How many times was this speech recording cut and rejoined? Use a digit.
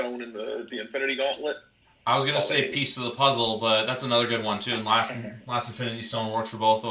1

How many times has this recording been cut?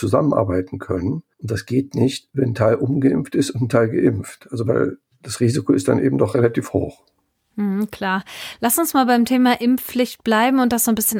1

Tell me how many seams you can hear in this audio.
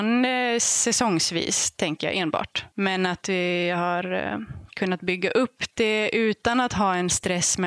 1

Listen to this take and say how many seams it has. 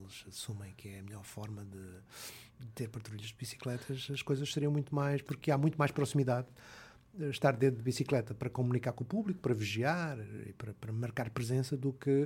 0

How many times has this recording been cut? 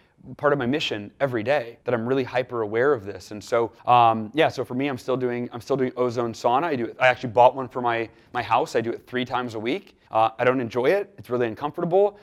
3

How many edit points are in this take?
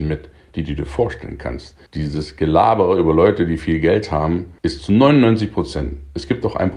2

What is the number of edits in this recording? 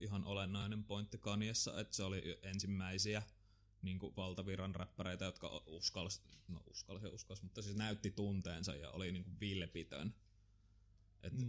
0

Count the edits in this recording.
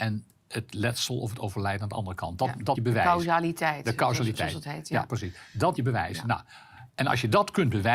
3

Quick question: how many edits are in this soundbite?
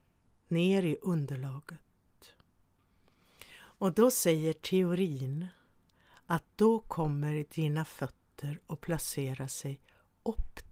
0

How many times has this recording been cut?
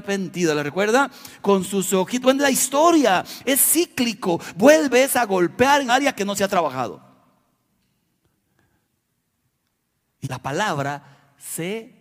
3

